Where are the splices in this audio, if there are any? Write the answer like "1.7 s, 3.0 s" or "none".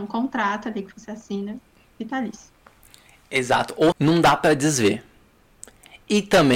3.9 s